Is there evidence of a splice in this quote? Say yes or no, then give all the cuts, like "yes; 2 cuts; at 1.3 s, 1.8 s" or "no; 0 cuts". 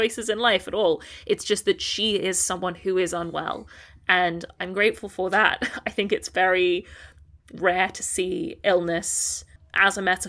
no; 0 cuts